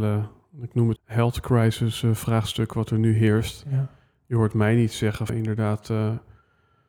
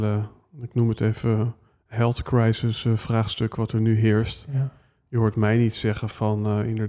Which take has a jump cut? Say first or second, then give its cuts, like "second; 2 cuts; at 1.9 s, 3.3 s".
first; 2 cuts; at 1.0 s, 5.3 s